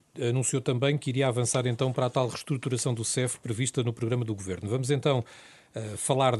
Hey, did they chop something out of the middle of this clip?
no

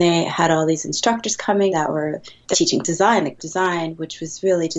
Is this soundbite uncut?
no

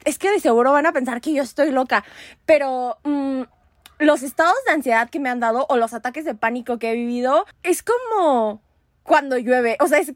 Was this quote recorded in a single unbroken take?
yes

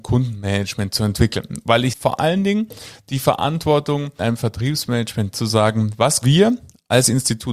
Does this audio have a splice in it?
yes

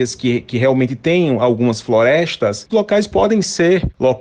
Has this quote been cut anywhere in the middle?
yes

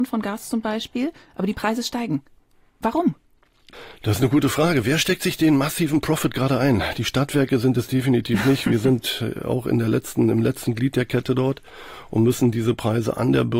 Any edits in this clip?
no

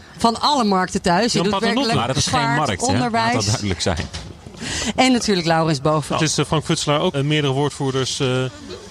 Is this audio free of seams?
no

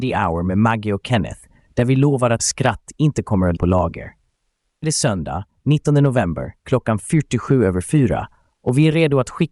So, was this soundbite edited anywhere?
yes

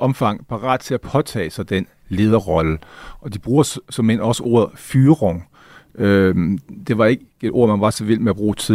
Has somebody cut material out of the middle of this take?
no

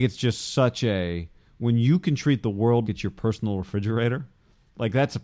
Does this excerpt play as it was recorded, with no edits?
no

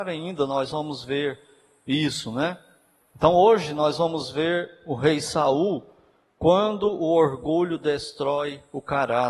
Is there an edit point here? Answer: no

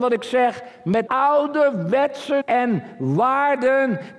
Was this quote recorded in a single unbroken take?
no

